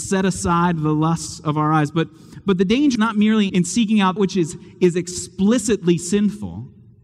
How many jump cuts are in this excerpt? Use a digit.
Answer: 3